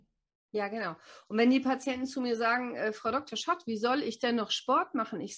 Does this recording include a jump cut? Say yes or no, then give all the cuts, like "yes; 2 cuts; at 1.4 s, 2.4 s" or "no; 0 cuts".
no; 0 cuts